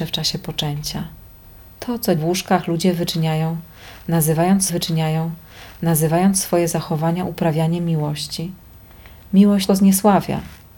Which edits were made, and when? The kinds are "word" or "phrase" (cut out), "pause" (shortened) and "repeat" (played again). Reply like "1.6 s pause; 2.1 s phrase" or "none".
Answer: 2.2 s word; 4.7 s repeat; 9.7 s word